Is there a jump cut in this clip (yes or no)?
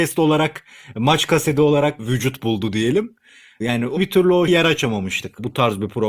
yes